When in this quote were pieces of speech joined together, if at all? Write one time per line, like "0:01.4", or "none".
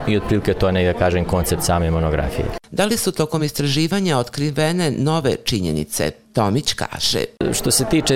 none